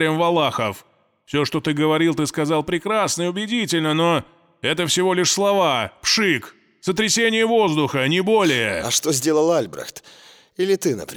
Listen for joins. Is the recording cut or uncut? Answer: uncut